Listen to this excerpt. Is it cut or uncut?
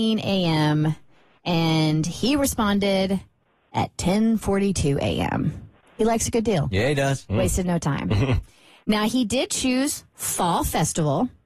uncut